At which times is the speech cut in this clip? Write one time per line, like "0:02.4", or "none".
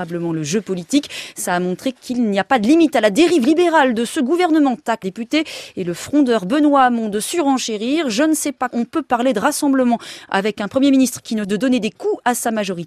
0:05.0
0:08.7
0:11.4

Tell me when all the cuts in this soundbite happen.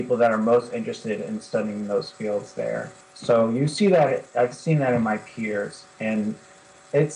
0:03.0

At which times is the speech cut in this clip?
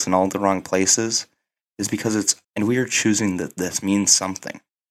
0:02.4

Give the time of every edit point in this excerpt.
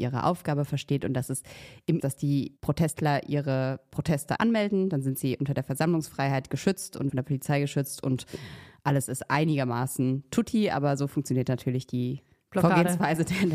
0:02.0
0:02.6
0:04.4
0:07.1

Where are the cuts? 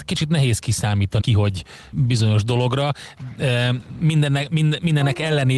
0:01.2
0:01.9

